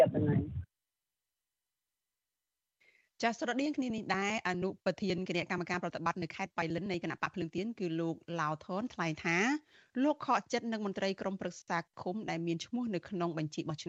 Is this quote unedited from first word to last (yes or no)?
yes